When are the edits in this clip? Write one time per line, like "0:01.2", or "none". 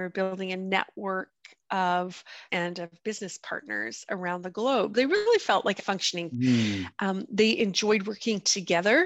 0:02.5
0:04.9
0:05.8
0:06.3